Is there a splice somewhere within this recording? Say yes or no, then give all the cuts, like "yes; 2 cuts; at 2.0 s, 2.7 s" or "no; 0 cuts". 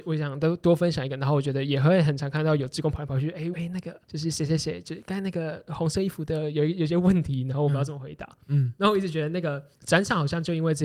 yes; 3 cuts; at 3.5 s, 4.0 s, 9.7 s